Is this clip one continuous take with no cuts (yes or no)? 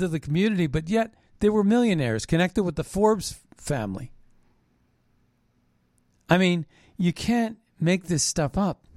yes